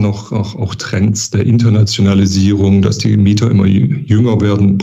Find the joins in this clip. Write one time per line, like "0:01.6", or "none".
none